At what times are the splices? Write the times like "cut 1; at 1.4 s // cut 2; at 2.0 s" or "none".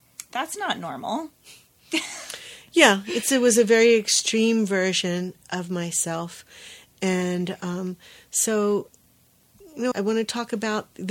cut 1; at 9.9 s